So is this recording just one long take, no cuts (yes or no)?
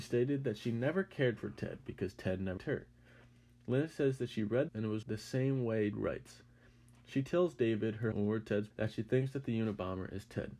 no